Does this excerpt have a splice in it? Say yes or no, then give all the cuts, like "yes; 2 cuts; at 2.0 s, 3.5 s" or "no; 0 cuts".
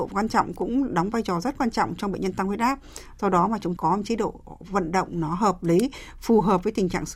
yes; 1 cut; at 3.8 s